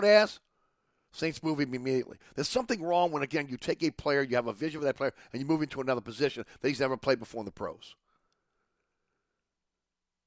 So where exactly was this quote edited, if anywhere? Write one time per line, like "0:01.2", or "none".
none